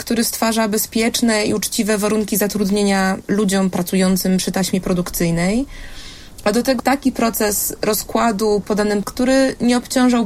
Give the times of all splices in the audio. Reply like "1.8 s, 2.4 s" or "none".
6.8 s, 8.6 s, 9.0 s